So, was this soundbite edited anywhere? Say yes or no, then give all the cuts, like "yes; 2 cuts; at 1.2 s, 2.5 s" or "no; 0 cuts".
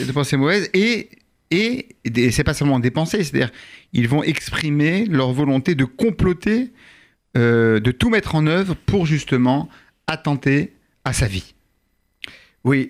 no; 0 cuts